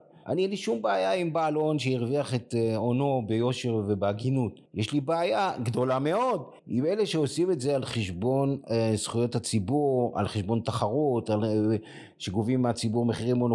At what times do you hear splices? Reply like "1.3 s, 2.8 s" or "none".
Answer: 4.7 s, 6.6 s